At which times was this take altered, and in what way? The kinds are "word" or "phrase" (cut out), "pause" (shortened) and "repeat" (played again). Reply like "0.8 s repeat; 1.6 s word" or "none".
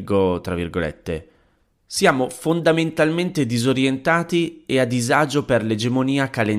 none